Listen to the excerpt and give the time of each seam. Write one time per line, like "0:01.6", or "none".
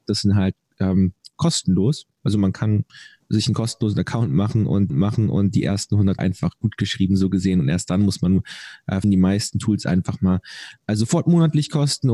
0:03.2
0:04.9
0:06.2
0:09.0

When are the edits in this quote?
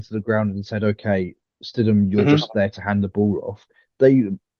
none

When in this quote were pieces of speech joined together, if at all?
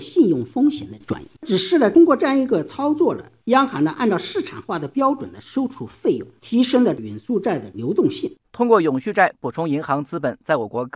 0:01.4
0:08.4

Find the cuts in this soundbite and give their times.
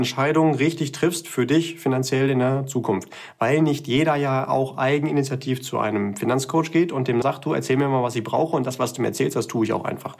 0:07.2

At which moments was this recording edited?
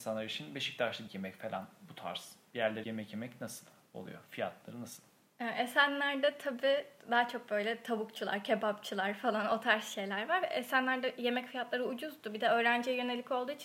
0:01.1
0:02.8

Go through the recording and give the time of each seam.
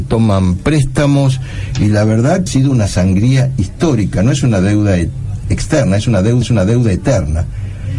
0:02.5
0:06.4

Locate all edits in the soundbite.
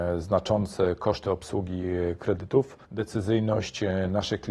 0:02.8

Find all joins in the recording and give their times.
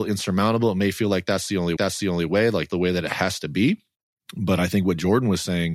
0:01.8
0:02.7
0:03.9

